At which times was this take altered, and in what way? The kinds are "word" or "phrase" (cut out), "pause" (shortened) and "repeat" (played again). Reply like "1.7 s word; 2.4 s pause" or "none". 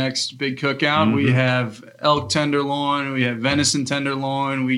none